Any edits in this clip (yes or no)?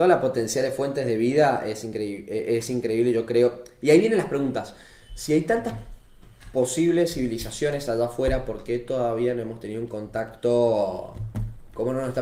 no